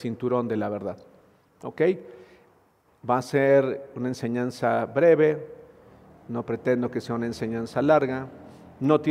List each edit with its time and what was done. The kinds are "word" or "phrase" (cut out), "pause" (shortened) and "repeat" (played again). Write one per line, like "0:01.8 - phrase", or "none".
none